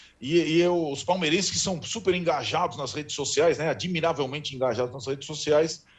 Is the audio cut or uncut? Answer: uncut